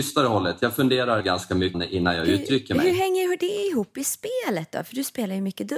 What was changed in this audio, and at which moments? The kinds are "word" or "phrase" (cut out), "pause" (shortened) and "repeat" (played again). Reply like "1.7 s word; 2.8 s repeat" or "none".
1.2 s word; 1.7 s word